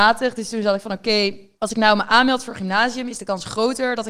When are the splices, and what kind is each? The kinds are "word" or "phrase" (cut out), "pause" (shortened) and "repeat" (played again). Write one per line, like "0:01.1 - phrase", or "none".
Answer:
0:01.6 - pause